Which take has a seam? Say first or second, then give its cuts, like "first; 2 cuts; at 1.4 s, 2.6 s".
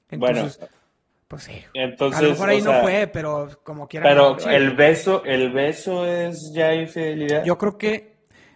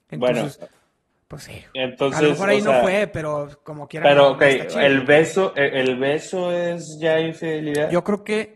first; 2 cuts; at 4.4 s, 5.2 s